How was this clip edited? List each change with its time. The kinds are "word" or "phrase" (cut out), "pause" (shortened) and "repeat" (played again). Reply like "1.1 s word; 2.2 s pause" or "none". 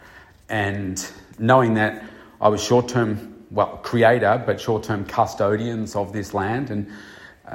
none